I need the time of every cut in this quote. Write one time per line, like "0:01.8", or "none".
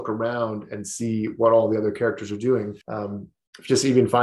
0:02.8